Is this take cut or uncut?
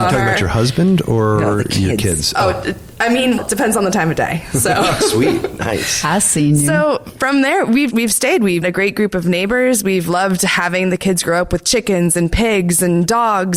cut